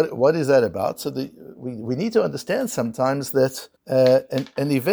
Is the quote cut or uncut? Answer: cut